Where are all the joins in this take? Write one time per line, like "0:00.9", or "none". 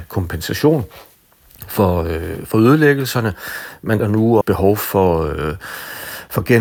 0:04.0
0:04.4